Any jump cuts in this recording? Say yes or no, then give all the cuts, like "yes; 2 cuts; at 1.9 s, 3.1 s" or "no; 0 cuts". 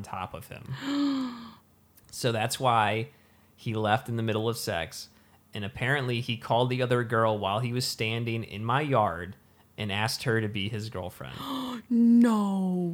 no; 0 cuts